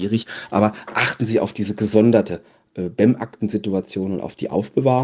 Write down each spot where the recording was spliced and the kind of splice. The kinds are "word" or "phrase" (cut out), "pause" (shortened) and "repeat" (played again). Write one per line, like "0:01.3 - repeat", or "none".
none